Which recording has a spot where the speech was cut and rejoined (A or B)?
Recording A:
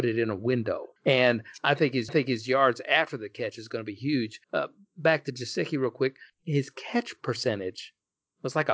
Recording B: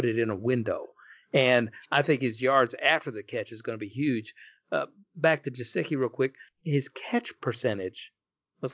A